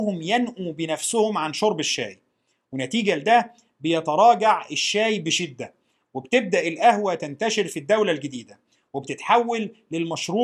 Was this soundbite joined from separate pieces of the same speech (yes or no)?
no